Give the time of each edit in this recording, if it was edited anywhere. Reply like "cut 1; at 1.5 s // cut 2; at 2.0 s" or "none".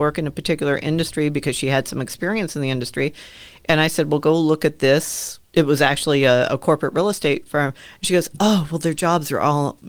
cut 1; at 5.4 s

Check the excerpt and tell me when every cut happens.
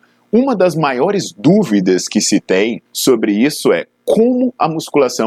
cut 1; at 2.9 s

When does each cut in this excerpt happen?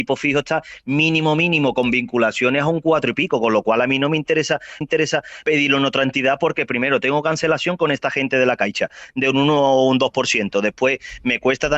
cut 1; at 4.8 s

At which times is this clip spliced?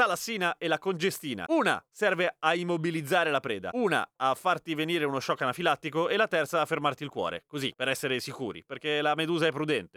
none

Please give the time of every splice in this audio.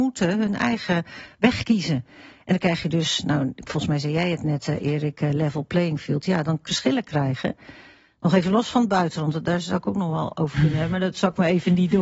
cut 1; at 6.7 s

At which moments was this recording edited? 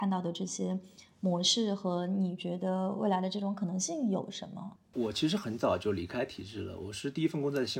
cut 1; at 4.8 s

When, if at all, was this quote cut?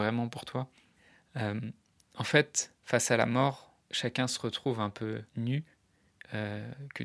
cut 1; at 2.8 s // cut 2; at 3.8 s // cut 3; at 5.3 s

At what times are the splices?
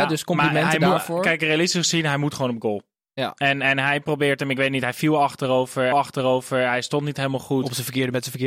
cut 1; at 5.9 s

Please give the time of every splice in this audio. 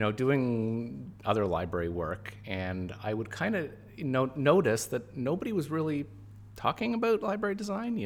none

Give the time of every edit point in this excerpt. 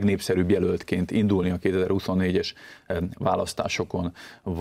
none

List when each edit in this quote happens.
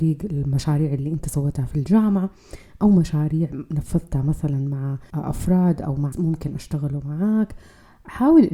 cut 1; at 5.1 s // cut 2; at 6.1 s

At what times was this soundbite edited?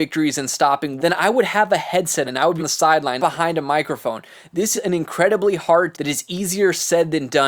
cut 1; at 1.0 s // cut 2; at 2.2 s // cut 3; at 2.6 s // cut 4; at 3.2 s // cut 5; at 4.7 s // cut 6; at 5.9 s

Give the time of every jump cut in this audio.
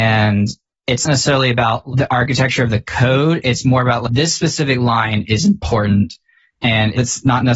cut 1; at 1.1 s

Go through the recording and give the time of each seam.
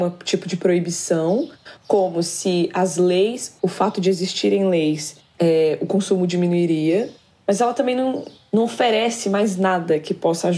none

